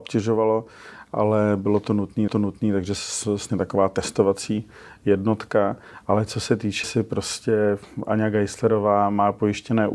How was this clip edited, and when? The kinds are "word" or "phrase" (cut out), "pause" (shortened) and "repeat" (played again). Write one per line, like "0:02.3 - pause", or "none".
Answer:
0:02.3 - repeat
0:03.5 - phrase
0:06.8 - word